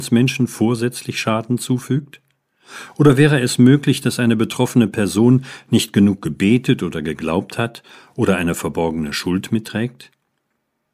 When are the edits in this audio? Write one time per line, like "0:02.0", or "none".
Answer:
0:09.6